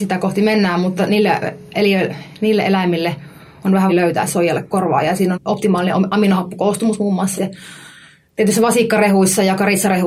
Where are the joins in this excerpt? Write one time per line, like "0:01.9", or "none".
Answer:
0:01.7
0:03.9
0:04.3
0:04.6
0:05.3
0:07.4